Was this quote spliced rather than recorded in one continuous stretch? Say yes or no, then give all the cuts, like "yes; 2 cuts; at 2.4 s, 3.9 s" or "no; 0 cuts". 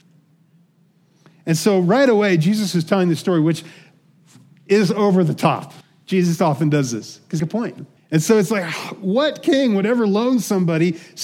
yes; 3 cuts; at 5.8 s, 7.4 s, 8.0 s